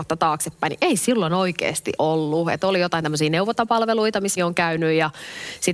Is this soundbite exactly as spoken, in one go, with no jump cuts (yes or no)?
no